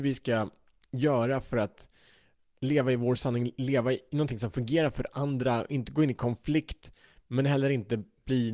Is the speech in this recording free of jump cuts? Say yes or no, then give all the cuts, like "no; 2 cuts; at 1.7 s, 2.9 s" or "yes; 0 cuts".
yes; 0 cuts